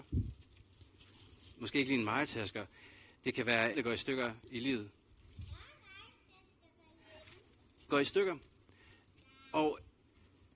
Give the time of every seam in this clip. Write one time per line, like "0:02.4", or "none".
0:03.7
0:07.9